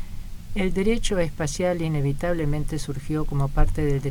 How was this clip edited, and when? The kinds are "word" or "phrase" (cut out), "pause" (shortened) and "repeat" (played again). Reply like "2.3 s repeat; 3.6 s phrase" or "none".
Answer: none